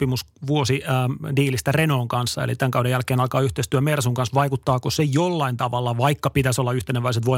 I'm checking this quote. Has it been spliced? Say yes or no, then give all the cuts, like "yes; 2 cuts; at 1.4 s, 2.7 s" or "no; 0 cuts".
no; 0 cuts